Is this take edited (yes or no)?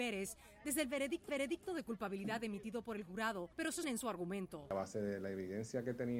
yes